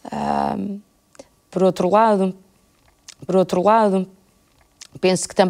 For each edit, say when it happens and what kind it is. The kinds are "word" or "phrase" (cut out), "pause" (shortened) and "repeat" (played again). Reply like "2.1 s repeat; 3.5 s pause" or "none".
3.3 s repeat